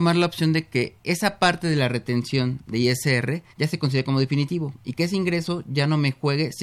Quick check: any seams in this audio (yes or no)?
yes